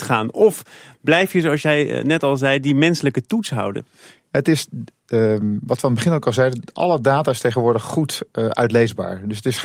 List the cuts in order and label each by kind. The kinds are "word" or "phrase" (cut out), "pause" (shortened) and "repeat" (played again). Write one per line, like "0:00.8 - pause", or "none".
none